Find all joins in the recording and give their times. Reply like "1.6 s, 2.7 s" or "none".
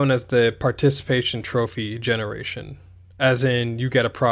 none